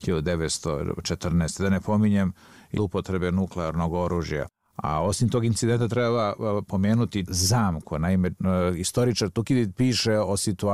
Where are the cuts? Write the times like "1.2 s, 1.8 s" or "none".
2.8 s, 7.3 s